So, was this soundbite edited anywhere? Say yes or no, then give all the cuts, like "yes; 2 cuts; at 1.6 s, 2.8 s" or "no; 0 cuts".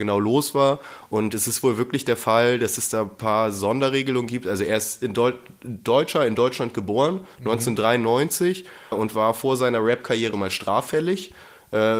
yes; 2 cuts; at 8.9 s, 10.3 s